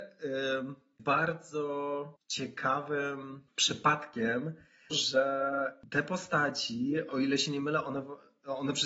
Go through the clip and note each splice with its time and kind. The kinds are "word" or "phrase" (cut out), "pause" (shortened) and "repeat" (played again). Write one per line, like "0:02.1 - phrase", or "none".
0:01.0 - word
0:04.9 - word
0:07.1 - word

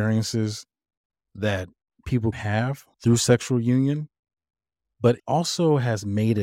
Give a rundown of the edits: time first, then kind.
0:02.3 - word
0:02.9 - pause
0:05.2 - word

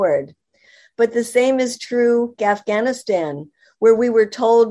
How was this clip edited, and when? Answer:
0:02.4 - phrase

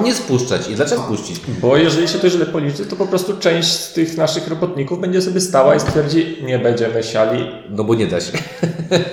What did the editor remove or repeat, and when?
0:01.0 - word

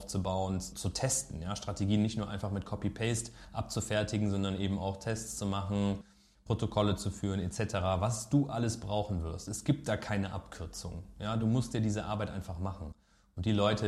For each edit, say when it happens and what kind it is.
none

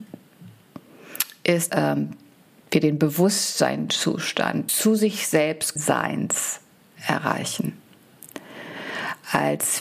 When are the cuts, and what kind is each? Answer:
0:01.7 - word
0:04.7 - word
0:05.8 - word

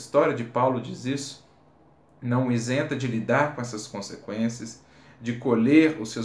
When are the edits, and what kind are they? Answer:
none

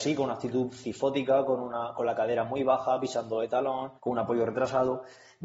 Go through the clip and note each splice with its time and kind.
0:04.0 - pause

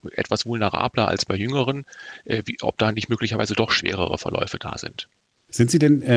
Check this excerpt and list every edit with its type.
none

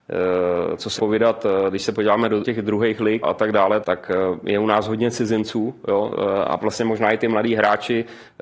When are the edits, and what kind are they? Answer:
0:01.0 - word
0:02.4 - word
0:03.2 - word
0:03.8 - word
0:06.6 - word

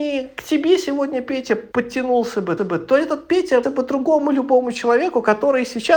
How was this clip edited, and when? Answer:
0:01.7 - pause
0:02.6 - repeat
0:03.6 - word

